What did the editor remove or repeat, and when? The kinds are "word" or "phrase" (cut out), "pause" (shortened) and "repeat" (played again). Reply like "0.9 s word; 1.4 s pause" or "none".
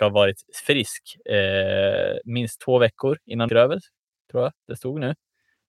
3.5 s word; 4.6 s pause